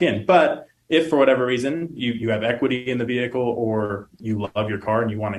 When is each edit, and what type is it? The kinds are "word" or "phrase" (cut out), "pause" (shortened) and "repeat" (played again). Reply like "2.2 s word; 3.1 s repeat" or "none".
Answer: none